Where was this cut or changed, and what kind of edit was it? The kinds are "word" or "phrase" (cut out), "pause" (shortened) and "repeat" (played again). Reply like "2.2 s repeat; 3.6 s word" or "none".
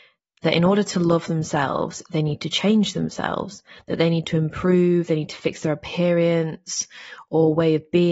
none